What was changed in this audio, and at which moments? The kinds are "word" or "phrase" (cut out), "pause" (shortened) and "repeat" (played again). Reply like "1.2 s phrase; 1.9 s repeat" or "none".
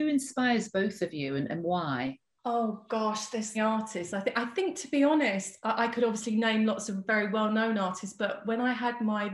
3.5 s phrase